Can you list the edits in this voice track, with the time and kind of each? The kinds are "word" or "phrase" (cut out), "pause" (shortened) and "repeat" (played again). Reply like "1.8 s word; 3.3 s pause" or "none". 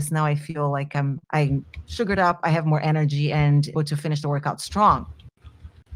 1.2 s pause; 3.7 s phrase